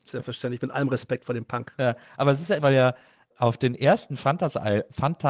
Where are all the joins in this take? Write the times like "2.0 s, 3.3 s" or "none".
2.6 s